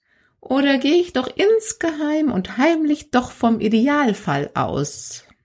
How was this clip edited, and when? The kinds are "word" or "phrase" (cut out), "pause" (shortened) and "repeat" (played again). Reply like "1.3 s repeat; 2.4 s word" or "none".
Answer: none